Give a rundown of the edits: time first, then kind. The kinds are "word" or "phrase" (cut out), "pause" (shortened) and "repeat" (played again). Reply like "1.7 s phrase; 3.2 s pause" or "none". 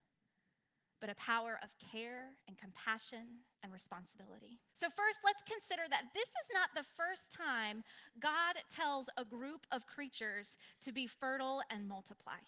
2.4 s pause; 3.5 s pause; 4.7 s pause